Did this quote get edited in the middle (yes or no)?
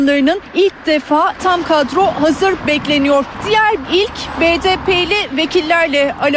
yes